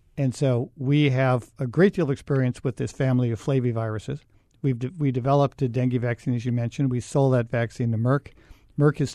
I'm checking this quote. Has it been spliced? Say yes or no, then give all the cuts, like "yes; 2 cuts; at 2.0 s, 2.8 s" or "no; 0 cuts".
no; 0 cuts